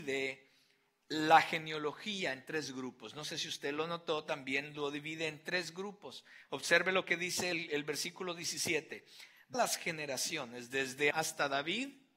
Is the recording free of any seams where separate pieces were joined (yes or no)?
no